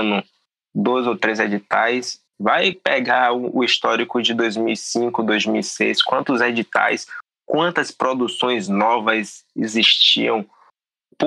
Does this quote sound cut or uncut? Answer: uncut